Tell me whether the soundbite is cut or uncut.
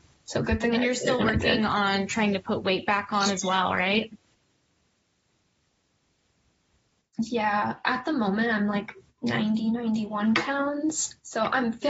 uncut